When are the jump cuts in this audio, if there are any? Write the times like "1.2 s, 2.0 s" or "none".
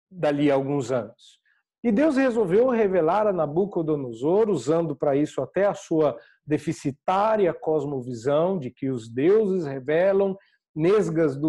none

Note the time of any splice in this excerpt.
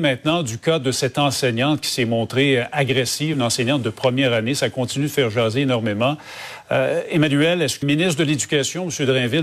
3.3 s, 7.8 s

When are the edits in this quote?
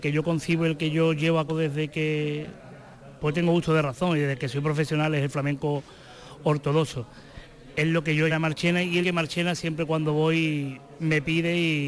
1.5 s, 8.3 s, 9.0 s

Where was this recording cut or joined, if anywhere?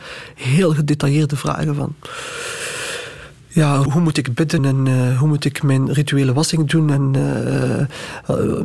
3.9 s, 4.6 s

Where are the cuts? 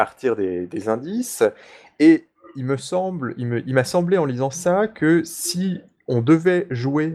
none

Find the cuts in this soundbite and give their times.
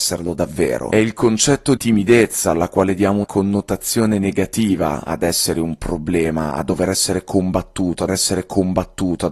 1.8 s, 3.2 s, 8.1 s

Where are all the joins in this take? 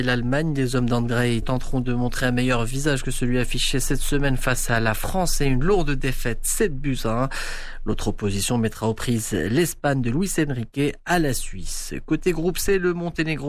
1.4 s

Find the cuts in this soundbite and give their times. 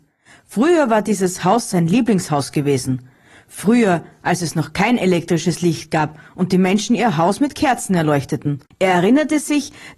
none

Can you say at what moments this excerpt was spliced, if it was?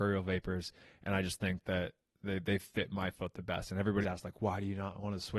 4.0 s

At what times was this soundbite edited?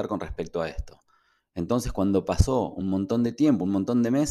none

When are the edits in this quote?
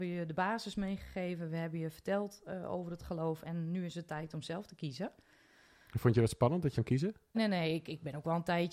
6.7 s, 7.3 s

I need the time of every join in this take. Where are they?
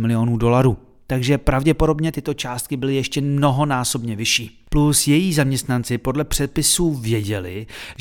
none

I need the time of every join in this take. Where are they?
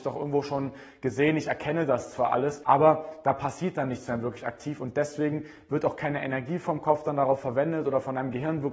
none

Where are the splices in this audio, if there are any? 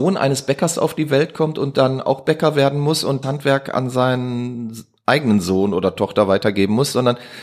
3.2 s

